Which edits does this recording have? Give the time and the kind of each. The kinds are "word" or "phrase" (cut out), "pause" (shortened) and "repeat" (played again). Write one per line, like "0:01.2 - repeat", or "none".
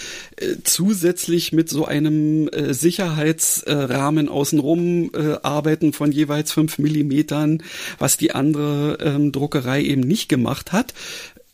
none